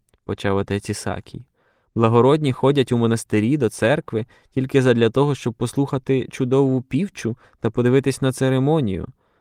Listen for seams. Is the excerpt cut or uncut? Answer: uncut